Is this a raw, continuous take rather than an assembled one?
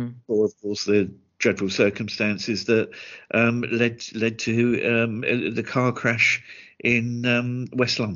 yes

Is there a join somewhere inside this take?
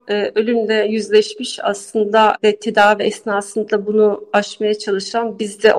no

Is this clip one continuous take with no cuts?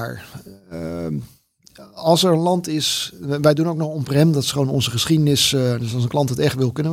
yes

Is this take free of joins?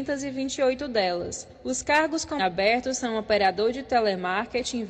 no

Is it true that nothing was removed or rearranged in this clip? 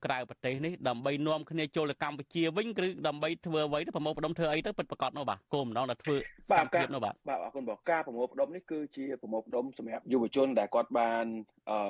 no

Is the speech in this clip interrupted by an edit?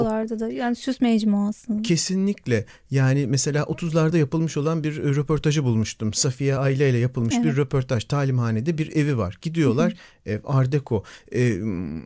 no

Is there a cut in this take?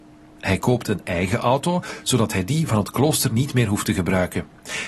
no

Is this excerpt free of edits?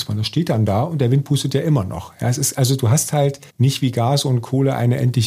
no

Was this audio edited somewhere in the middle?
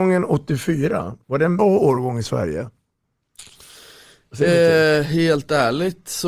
yes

